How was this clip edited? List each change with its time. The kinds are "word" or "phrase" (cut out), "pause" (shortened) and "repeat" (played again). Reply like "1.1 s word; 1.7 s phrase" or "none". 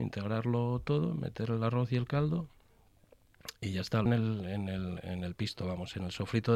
4.1 s phrase